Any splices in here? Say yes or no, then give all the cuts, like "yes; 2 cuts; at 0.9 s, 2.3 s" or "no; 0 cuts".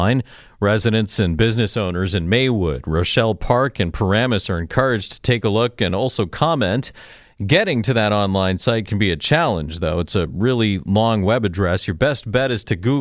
no; 0 cuts